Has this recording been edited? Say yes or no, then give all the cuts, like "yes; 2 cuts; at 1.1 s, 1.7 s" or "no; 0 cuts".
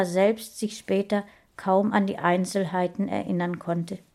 no; 0 cuts